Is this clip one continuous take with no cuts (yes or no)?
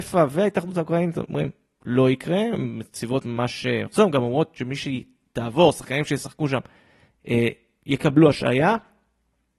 yes